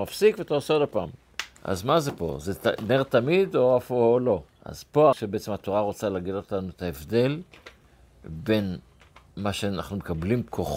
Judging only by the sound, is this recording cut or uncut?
cut